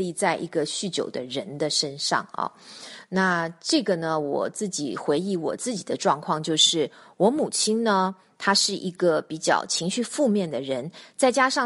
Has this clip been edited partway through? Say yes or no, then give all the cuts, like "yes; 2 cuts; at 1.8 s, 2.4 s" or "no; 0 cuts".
no; 0 cuts